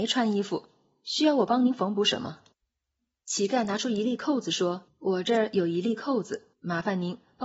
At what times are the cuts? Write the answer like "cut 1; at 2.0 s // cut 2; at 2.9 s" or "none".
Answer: cut 1; at 2.5 s // cut 2; at 4.9 s // cut 3; at 6.5 s